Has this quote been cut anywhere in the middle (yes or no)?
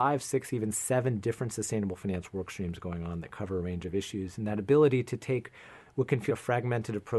yes